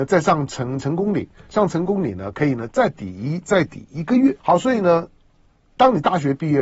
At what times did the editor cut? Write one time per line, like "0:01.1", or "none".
0:04.4